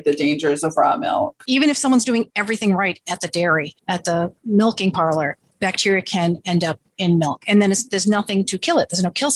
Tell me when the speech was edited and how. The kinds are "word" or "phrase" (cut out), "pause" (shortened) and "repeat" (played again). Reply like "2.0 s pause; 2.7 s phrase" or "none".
none

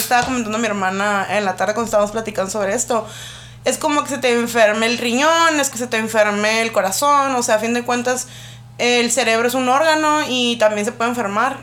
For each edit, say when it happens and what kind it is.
5.7 s word

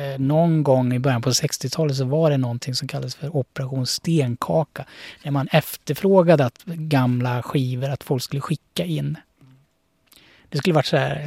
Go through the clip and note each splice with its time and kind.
none

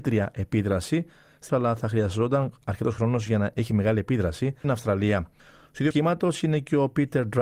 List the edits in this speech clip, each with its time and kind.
1.5 s phrase; 4.6 s word; 5.9 s word

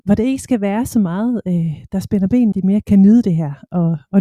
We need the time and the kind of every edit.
1.9 s word; 2.5 s phrase; 2.8 s word

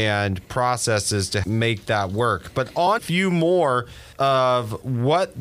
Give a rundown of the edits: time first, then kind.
1.4 s word; 3.0 s phrase; 4.1 s pause

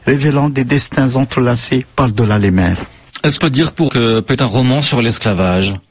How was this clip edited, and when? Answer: 3.4 s word; 3.9 s word; 4.3 s word

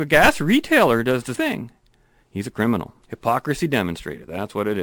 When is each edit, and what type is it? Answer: 1.4 s word; 3.0 s pause

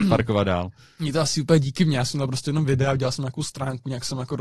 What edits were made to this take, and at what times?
none

